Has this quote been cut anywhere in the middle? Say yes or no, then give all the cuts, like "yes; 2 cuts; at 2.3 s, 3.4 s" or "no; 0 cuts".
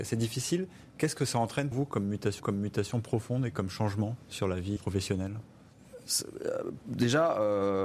yes; 3 cuts; at 1.7 s, 2.4 s, 4.8 s